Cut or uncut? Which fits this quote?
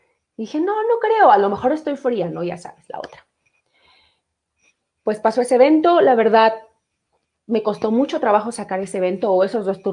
uncut